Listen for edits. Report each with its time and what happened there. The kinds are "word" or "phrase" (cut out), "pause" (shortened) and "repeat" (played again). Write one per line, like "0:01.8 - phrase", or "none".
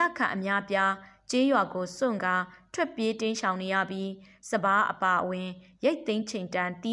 none